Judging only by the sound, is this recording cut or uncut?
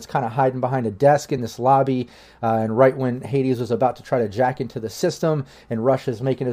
uncut